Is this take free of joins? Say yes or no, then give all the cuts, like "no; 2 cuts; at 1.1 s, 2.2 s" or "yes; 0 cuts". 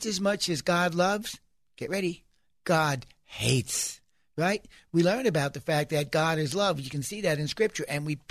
yes; 0 cuts